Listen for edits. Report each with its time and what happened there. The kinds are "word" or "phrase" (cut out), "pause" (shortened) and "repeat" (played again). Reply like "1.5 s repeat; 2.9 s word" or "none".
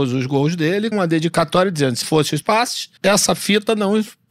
0.9 s word; 2.0 s word; 2.4 s word; 3.0 s pause